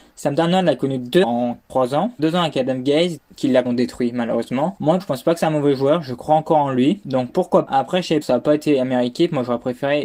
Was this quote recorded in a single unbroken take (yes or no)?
no